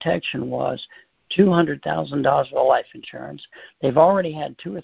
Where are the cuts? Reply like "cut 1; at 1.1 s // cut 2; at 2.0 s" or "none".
none